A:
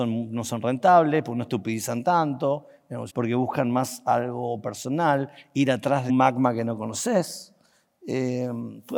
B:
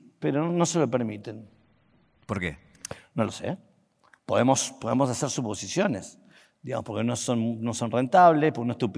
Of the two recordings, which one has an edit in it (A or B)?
A